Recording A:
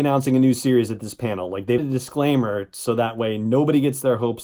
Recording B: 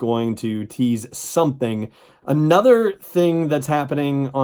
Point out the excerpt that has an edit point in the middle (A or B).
A